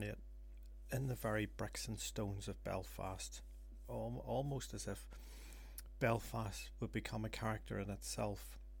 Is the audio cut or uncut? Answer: uncut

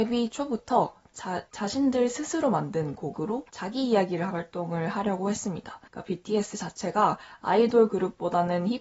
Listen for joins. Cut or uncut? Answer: cut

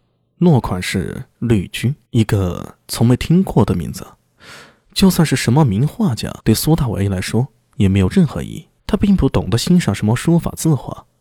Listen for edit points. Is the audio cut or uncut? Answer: cut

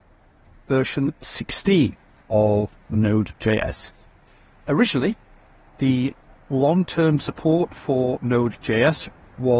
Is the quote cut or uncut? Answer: uncut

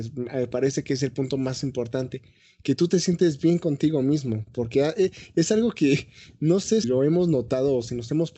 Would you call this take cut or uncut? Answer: cut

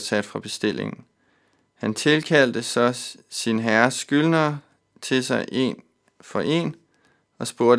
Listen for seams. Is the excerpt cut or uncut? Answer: uncut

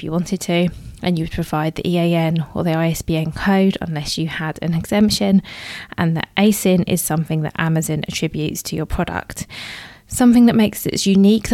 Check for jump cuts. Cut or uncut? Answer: uncut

